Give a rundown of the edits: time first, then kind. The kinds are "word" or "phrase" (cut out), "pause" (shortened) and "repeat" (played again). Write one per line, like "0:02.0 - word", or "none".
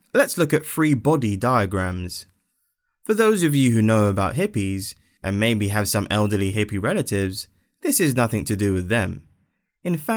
none